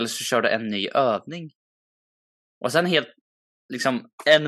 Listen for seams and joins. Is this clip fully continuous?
yes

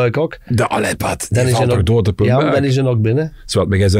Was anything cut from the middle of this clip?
no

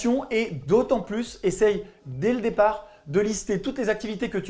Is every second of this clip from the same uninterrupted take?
yes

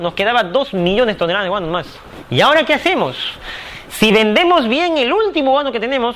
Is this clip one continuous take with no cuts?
yes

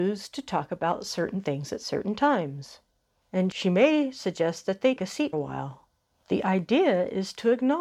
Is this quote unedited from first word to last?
no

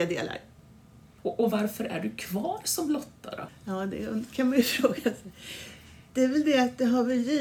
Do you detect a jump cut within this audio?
no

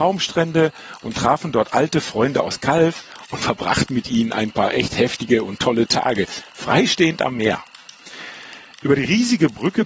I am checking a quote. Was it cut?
no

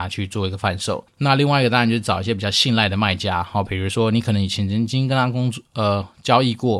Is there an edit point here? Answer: yes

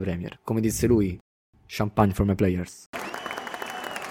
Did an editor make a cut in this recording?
no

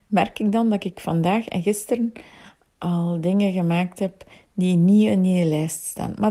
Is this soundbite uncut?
yes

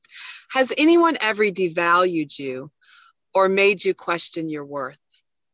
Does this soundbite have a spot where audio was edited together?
no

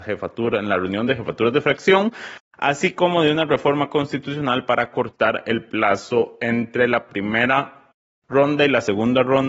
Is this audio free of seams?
yes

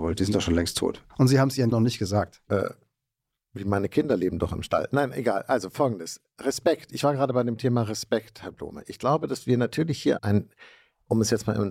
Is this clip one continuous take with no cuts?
no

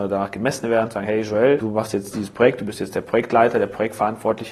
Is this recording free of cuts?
yes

